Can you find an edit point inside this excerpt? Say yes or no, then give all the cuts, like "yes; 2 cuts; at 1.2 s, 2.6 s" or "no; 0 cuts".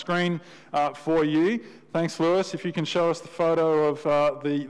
no; 0 cuts